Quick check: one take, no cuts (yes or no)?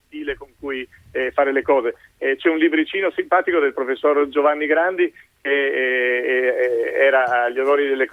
yes